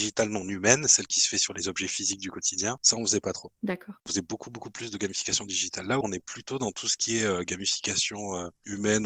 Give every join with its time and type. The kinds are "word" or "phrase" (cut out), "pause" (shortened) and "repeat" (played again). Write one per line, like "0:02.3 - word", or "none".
0:06.0 - word